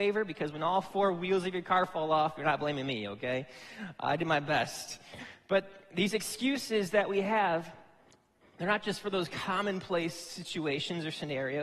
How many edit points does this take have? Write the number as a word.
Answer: zero